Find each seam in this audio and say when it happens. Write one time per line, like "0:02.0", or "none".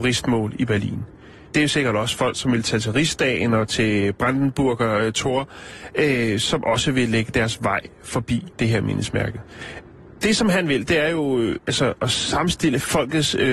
0:08.5